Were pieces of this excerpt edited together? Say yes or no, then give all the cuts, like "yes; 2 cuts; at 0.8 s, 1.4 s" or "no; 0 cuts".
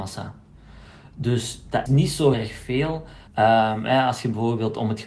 yes; 3 cuts; at 1.9 s, 2.3 s, 3.3 s